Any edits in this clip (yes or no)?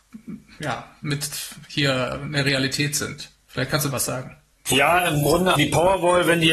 yes